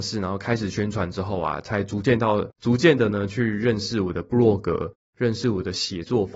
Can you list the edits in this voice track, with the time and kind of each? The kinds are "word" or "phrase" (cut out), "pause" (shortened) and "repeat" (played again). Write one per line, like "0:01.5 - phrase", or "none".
0:02.5 - pause